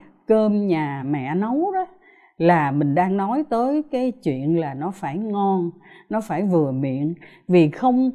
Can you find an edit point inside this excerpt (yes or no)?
no